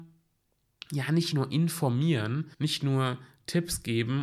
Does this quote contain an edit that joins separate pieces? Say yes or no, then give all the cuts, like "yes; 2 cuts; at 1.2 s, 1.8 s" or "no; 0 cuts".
yes; 1 cut; at 2.5 s